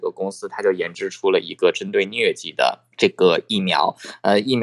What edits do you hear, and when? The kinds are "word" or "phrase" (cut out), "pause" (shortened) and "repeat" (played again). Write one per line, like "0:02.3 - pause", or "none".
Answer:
0:02.9 - pause